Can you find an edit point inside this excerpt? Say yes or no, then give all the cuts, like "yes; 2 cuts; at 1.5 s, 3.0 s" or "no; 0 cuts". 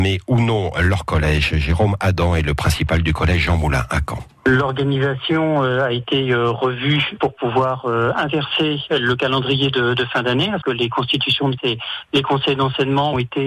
yes; 2 cuts; at 10.6 s, 11.6 s